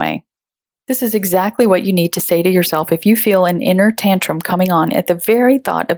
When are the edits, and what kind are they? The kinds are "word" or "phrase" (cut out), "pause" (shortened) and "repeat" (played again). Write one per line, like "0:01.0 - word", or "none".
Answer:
none